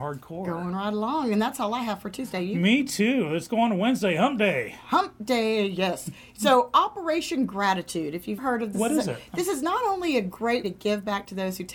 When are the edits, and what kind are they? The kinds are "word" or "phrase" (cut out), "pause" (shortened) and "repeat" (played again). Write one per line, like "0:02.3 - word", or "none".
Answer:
0:08.4 - word
0:08.7 - word
0:10.6 - word